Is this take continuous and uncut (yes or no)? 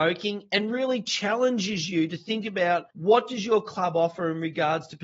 no